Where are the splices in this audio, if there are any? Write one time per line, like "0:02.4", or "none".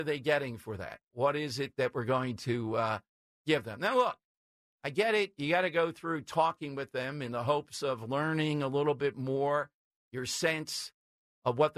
none